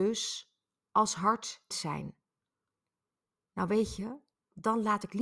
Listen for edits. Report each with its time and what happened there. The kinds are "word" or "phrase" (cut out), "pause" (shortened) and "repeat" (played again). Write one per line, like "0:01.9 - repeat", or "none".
0:01.7 - phrase